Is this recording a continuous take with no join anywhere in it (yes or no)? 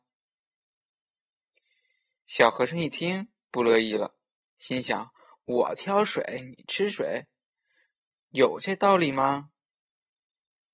yes